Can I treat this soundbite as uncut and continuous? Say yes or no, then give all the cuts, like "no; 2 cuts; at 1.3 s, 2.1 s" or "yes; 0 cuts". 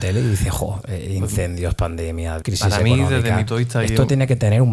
no; 2 cuts; at 2.4 s, 3.5 s